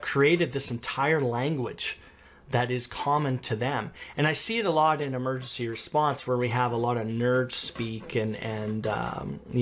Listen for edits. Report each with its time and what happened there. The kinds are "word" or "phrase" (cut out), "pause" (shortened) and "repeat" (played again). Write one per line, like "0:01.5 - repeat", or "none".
none